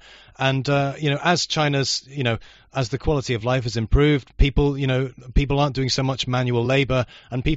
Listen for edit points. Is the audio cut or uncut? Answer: uncut